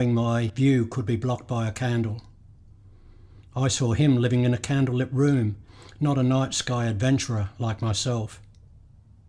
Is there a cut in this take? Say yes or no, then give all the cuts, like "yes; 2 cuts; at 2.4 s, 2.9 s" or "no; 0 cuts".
no; 0 cuts